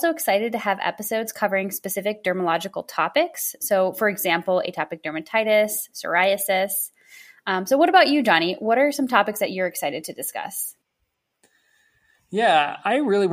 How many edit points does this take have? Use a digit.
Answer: 0